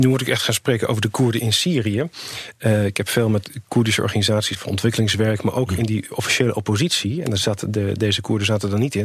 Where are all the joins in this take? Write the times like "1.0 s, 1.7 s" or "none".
4.5 s